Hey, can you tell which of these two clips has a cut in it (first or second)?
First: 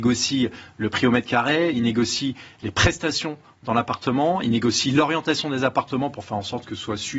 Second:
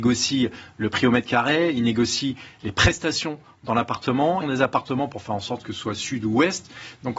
second